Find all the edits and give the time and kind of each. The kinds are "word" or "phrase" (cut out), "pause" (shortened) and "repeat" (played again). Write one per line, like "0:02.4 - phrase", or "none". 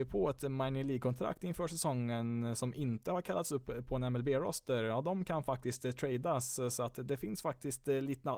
none